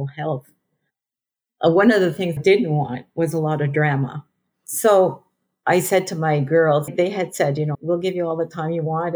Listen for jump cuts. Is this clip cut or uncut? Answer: cut